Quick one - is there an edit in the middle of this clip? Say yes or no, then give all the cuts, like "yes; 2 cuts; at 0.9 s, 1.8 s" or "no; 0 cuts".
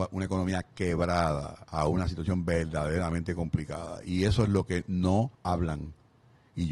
yes; 1 cut; at 5.3 s